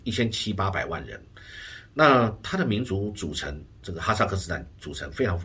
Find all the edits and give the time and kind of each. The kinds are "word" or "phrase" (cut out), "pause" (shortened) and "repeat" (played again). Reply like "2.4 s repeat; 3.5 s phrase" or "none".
3.7 s pause